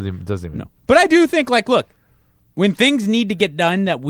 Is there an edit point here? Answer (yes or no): no